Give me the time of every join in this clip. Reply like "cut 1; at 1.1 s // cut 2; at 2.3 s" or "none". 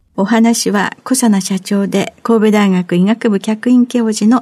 none